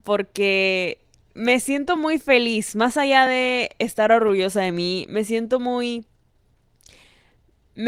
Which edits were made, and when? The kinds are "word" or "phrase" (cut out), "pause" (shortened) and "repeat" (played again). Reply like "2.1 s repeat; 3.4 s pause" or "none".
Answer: none